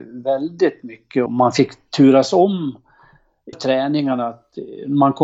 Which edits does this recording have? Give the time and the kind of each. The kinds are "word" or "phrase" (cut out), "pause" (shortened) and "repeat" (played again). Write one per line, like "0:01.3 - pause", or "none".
0:01.3 - word
0:03.5 - word